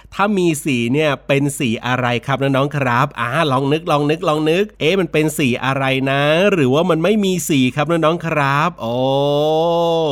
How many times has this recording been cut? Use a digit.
1